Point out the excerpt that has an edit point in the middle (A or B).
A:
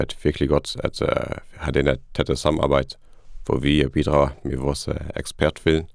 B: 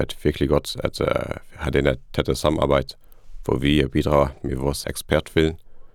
B